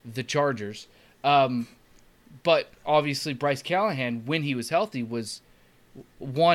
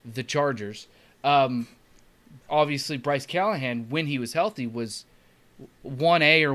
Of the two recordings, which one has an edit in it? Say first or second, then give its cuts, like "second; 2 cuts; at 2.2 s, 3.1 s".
second; 1 cut; at 2.4 s